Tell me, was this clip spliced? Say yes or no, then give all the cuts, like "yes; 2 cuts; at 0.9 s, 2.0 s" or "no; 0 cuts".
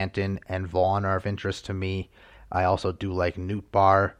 no; 0 cuts